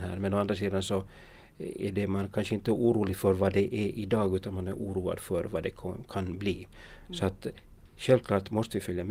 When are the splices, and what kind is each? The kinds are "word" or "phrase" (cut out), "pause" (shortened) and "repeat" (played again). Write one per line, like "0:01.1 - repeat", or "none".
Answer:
none